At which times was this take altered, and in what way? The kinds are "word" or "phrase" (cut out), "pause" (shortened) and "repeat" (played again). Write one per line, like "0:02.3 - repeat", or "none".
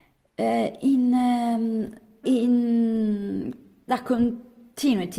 0:02.2 - word
0:03.9 - word